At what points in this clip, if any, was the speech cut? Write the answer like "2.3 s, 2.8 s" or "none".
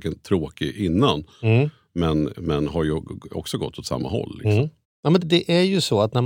5.2 s